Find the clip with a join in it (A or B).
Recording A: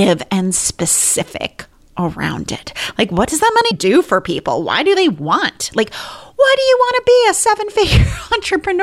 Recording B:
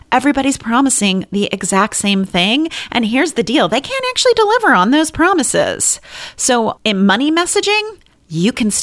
A